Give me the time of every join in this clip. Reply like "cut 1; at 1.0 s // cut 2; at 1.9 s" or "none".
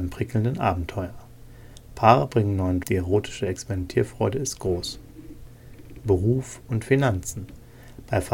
cut 1; at 2.8 s